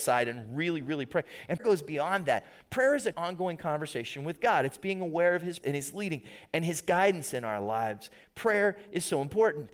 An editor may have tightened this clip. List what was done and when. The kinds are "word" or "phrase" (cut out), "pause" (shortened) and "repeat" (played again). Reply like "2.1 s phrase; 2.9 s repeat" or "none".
1.6 s word; 3.1 s word; 5.6 s word